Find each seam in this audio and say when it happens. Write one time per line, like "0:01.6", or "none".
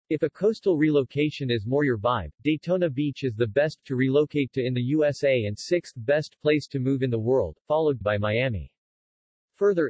0:03.8
0:08.0

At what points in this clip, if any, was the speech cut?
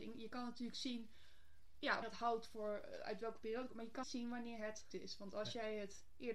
0:02.0
0:04.0
0:04.9

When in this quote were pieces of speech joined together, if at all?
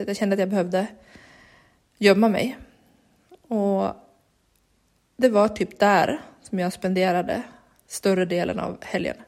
none

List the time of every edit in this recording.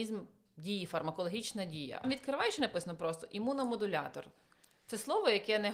0:02.0

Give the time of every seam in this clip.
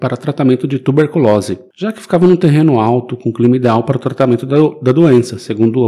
none

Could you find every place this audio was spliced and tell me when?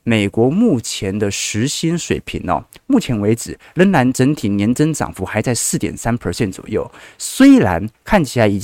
none

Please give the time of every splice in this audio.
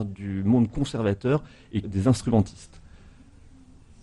0:01.8

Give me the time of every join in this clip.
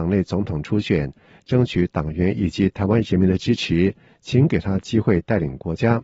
none

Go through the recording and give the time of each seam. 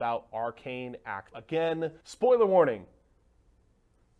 0:01.3
0:02.0

